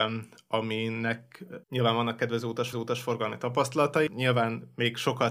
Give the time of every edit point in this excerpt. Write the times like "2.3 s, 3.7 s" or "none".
1.6 s, 2.7 s, 4.1 s